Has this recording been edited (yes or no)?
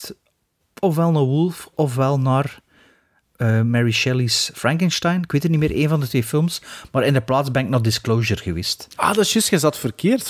no